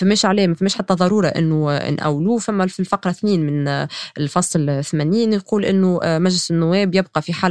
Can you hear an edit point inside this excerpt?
no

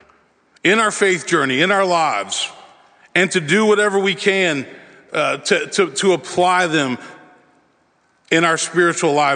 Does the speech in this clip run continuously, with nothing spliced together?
yes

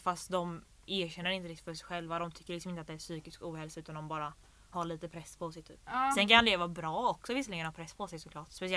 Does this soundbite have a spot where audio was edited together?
no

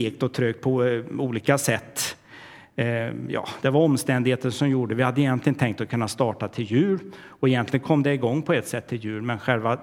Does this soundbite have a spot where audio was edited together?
no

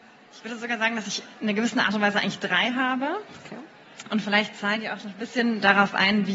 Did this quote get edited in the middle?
no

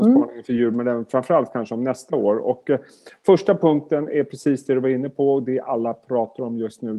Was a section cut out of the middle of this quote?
no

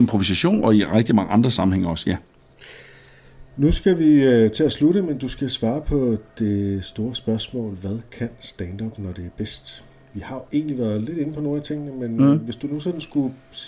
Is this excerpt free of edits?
yes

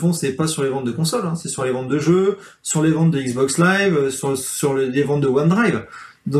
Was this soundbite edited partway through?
no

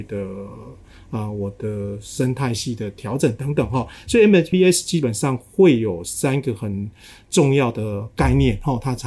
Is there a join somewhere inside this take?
yes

